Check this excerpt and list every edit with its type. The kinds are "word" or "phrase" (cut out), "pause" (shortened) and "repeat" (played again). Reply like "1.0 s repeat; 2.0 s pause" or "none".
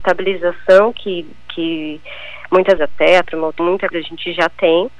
2.8 s phrase; 3.2 s word; 3.6 s word; 3.9 s word